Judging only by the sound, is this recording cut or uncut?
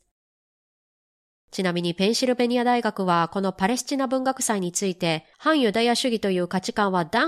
cut